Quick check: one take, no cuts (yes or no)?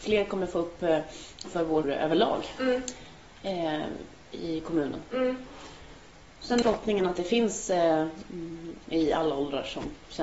no